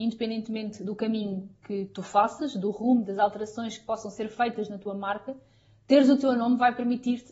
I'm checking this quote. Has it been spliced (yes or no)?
no